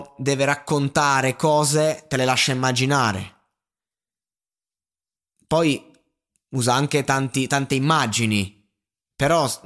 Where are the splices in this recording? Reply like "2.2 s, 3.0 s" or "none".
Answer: none